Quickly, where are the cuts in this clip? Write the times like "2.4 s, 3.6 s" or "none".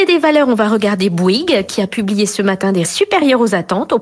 2.8 s